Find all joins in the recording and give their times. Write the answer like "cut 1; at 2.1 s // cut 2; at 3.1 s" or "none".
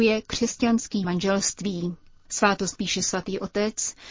cut 1; at 1.0 s // cut 2; at 2.8 s